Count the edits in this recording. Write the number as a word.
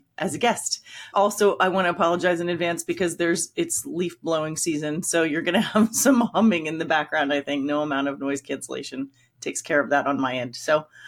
zero